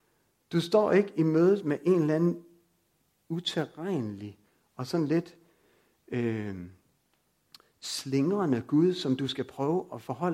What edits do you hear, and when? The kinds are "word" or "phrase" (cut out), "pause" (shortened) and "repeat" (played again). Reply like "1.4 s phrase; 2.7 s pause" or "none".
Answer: none